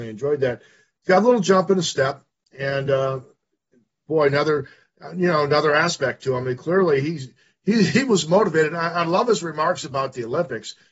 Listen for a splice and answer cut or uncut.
uncut